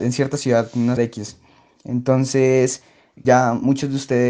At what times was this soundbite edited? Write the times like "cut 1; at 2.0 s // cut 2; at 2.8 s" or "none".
cut 1; at 1.0 s // cut 2; at 3.2 s